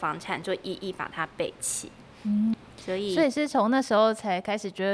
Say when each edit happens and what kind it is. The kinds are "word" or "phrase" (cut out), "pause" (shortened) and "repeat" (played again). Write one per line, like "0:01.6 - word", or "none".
0:02.5 - word